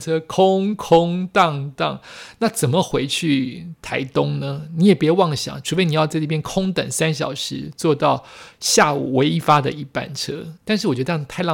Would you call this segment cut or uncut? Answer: cut